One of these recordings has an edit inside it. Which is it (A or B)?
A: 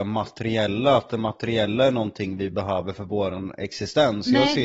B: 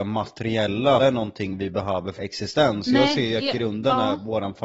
B